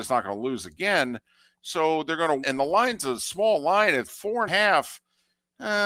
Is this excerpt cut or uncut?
cut